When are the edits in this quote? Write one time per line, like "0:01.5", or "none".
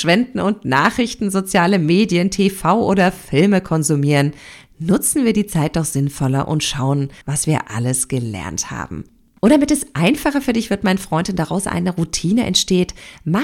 0:07.2